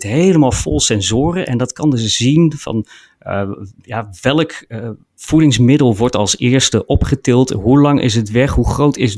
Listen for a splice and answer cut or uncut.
cut